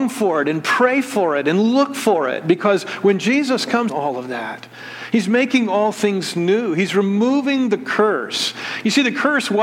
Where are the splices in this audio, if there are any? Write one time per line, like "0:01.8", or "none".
0:03.9

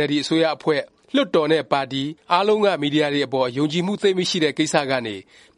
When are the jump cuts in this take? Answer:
none

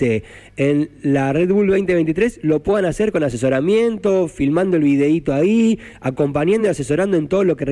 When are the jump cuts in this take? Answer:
none

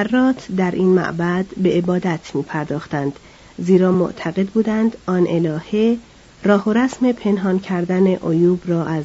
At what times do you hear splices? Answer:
none

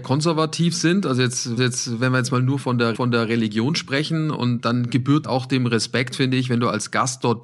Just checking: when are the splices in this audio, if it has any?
0:01.6
0:02.9
0:04.6
0:05.2

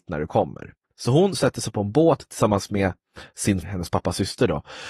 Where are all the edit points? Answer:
0:03.6

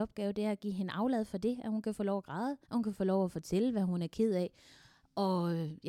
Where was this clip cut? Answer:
0:02.6

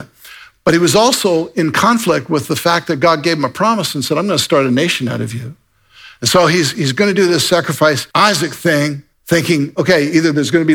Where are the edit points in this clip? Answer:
0:08.1
0:09.1

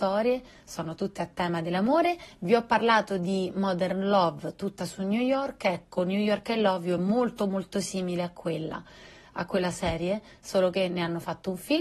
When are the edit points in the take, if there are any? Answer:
none

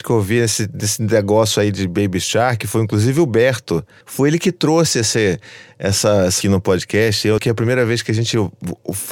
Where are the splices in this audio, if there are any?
0:06.4
0:07.4

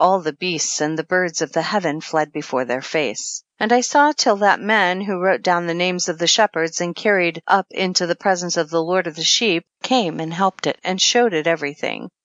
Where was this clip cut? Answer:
0:03.5
0:09.7

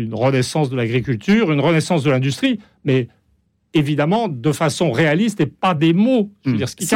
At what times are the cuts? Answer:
none

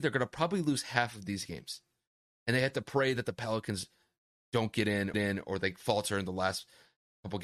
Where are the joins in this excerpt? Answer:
0:05.1

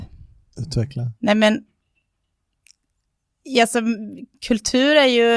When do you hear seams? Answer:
0:01.2

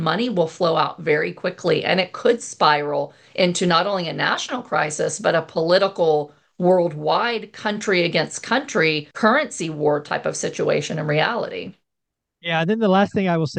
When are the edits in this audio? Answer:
0:09.1

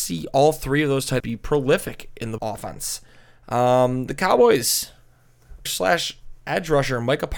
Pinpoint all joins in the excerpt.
0:01.2
0:02.4
0:05.7

